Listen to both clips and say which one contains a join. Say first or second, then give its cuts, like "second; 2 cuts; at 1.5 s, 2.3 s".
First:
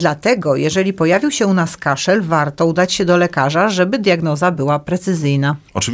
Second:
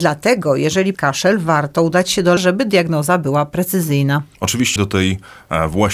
second; 3 cuts; at 0.9 s, 2.4 s, 4.8 s